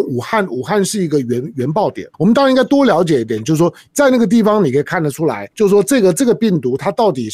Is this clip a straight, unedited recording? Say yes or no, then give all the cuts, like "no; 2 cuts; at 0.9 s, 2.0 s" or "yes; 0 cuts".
no; 2 cuts; at 2.1 s, 5.5 s